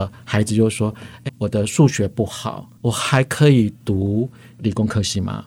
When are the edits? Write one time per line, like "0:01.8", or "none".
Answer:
0:01.3
0:02.7

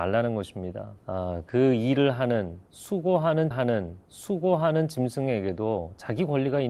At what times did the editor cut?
0:01.0
0:03.5

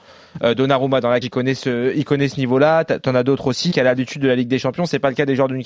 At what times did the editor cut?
0:01.2
0:03.7

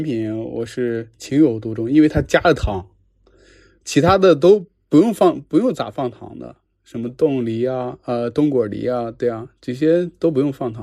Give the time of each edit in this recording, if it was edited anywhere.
none

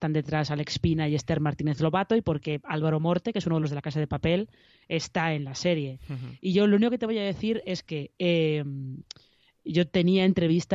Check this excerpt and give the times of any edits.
none

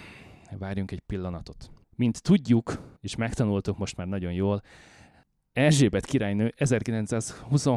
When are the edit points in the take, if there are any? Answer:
0:01.8
0:03.0

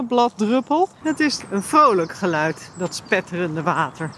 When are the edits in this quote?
0:00.9

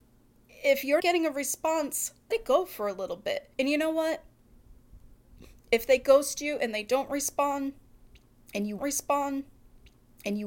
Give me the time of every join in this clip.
0:01.0
0:02.3
0:03.5
0:08.8

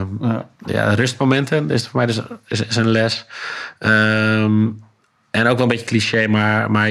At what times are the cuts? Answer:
none

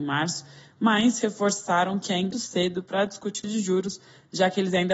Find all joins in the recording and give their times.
0:02.3
0:03.4

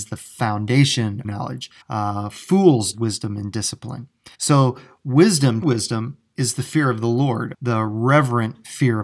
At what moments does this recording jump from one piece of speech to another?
0:01.2
0:01.8
0:02.9
0:04.3
0:05.6
0:07.5

